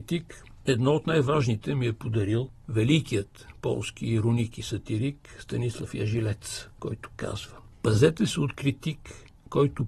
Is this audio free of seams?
yes; 0 cuts

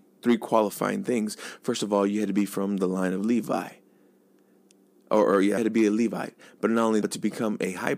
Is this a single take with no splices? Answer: no; 2 cuts; at 5.6 s, 7.0 s

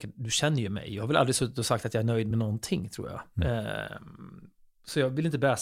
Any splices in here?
no; 0 cuts

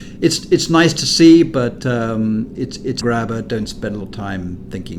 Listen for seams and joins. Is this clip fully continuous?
no; 3 cuts; at 2.5 s, 3.0 s, 4.0 s

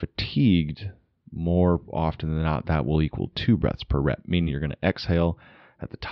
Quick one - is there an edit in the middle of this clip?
no; 0 cuts

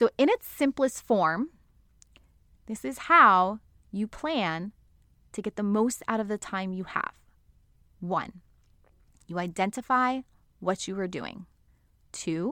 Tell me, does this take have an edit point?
no; 0 cuts

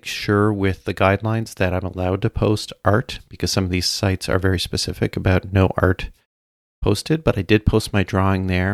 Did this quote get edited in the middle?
no; 0 cuts

